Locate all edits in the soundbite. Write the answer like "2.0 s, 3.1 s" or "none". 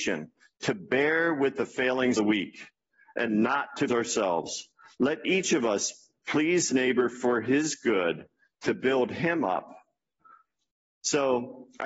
2.1 s, 3.9 s, 6.7 s